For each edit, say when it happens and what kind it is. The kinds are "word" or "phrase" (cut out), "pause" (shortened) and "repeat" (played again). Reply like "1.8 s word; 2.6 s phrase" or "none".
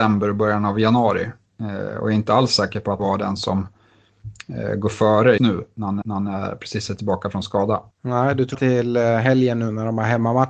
3.0 s phrase; 5.4 s word; 6.0 s repeat; 7.9 s pause; 8.5 s phrase